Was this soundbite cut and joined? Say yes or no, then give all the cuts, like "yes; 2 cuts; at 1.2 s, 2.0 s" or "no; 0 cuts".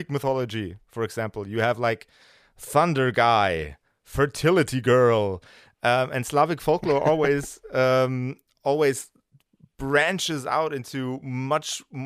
no; 0 cuts